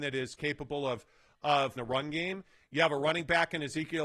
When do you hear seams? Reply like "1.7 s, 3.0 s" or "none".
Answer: 1.8 s

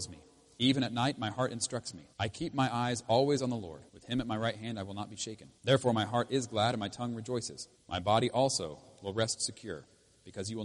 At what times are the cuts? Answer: 2.1 s, 3.9 s, 5.6 s, 7.8 s

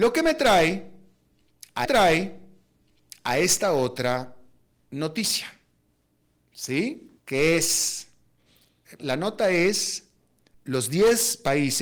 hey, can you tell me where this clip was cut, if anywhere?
1.8 s, 7.2 s, 9.0 s, 10.5 s

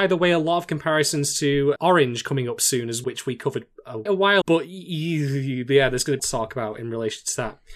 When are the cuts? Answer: 1.8 s, 3.0 s, 4.1 s, 4.4 s, 6.2 s

